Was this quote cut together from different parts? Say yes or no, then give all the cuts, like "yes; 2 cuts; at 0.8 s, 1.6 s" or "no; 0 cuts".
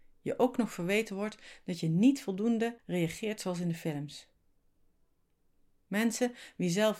no; 0 cuts